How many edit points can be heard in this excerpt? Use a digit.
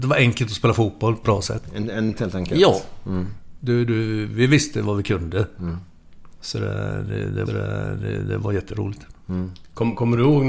3